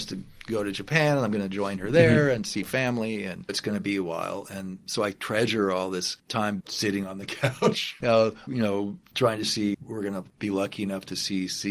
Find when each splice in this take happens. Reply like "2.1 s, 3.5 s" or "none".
3.5 s, 4.9 s, 6.6 s, 8.0 s, 8.5 s, 9.7 s